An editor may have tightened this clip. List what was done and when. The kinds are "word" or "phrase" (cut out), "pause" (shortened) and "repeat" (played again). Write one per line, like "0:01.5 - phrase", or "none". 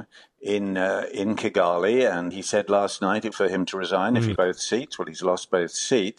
0:02.3 - word
0:03.3 - phrase
0:04.4 - word